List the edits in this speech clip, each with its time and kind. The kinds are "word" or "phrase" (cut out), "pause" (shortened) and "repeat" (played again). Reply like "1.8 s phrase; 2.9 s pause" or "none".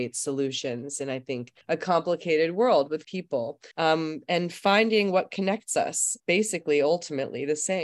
1.6 s pause; 3.0 s word; 3.7 s pause; 6.2 s word